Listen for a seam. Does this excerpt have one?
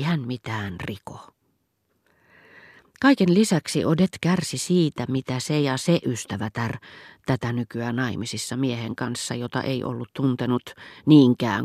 no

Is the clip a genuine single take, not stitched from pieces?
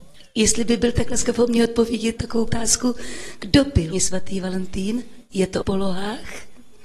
no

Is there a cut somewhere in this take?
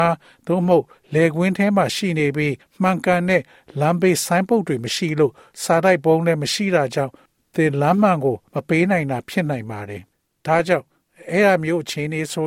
yes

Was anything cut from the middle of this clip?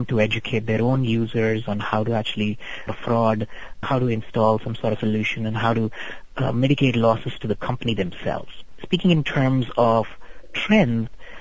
yes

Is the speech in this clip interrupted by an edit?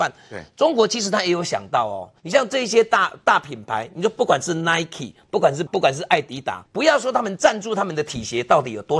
yes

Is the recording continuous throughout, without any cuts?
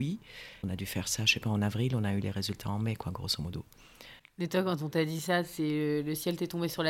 yes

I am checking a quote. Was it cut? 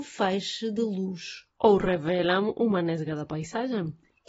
yes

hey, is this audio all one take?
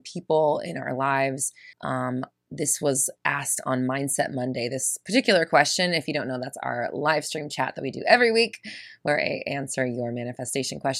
no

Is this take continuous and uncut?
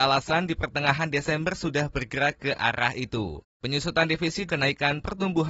no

